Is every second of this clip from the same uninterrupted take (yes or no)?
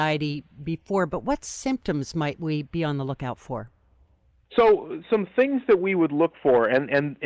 yes